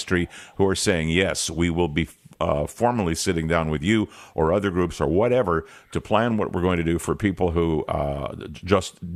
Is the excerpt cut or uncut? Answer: uncut